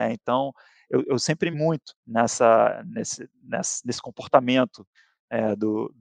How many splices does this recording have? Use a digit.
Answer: 2